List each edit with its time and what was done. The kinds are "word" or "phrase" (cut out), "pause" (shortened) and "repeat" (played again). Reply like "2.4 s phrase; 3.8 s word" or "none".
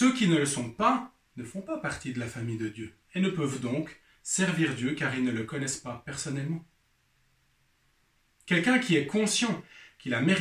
none